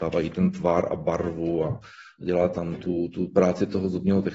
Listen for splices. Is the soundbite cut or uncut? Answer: uncut